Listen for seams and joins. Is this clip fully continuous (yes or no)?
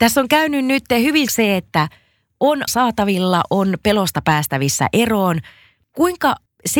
no